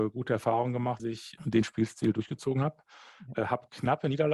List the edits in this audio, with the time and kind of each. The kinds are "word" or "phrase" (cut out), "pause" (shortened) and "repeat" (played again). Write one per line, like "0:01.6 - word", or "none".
0:01.0 - word
0:01.4 - word